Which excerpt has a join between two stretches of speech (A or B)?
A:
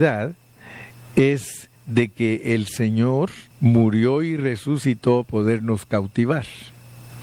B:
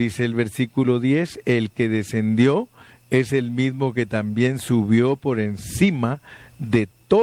A